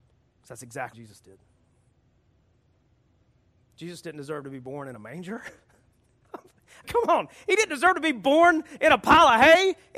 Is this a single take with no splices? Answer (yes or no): no